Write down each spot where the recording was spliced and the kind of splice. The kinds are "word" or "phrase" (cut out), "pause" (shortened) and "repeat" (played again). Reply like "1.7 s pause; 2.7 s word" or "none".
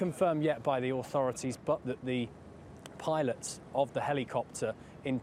1.8 s word